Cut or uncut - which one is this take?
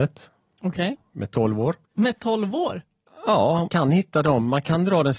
cut